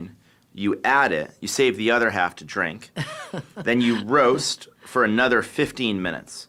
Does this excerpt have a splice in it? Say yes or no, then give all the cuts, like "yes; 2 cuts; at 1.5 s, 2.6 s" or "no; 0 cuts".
no; 0 cuts